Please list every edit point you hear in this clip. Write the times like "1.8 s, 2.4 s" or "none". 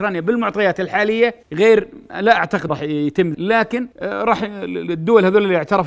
1.4 s, 2.7 s, 3.3 s, 3.9 s